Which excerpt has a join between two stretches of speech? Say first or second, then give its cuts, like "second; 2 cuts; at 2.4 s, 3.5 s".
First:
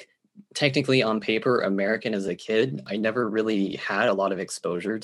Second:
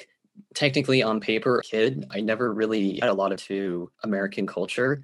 second; 4 cuts; at 1.6 s, 3.0 s, 3.4 s, 3.9 s